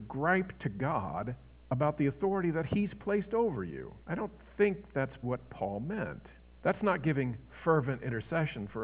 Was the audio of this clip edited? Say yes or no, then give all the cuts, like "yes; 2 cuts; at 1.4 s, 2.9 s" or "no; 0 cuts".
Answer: yes; 3 cuts; at 4.0 s, 5.2 s, 6.5 s